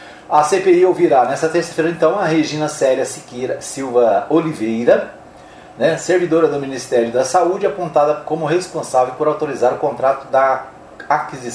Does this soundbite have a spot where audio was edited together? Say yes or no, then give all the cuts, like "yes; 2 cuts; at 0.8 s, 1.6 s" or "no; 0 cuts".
no; 0 cuts